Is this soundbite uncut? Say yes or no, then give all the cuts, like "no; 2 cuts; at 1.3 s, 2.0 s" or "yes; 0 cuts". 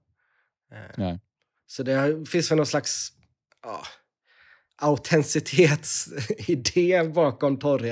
yes; 0 cuts